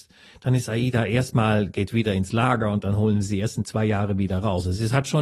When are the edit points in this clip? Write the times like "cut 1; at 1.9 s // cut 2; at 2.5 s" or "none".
none